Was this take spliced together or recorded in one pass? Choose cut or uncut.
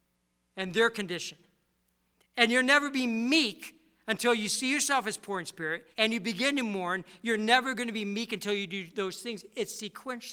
cut